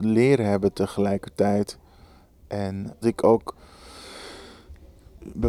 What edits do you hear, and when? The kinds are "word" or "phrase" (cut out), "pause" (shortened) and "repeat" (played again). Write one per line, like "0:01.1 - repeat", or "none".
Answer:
0:03.0 - word